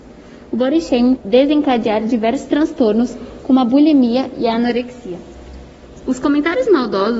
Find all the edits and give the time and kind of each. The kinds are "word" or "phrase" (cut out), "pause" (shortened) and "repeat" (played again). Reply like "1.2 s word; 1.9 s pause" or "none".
1.2 s word